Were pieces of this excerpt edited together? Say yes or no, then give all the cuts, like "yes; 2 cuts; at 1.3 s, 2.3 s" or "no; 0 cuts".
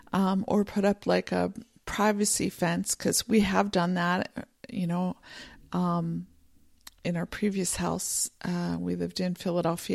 no; 0 cuts